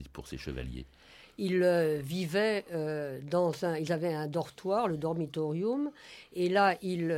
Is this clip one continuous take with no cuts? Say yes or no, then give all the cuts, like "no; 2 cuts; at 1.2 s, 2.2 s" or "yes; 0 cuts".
yes; 0 cuts